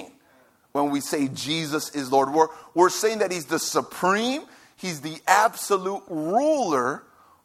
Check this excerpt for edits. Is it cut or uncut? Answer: uncut